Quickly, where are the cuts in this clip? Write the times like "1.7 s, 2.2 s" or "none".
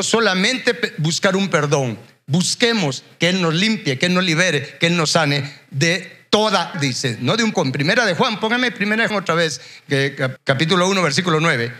6.7 s, 7.5 s, 9.1 s, 10.4 s